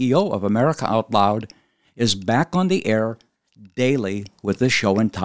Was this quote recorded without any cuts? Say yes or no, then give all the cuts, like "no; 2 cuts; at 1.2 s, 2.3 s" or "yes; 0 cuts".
yes; 0 cuts